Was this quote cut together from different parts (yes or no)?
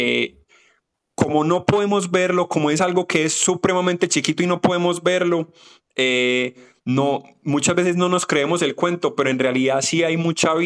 no